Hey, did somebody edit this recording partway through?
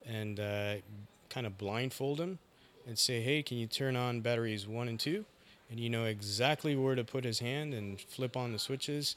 no; 0 cuts

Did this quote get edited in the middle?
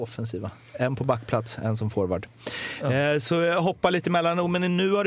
no; 0 cuts

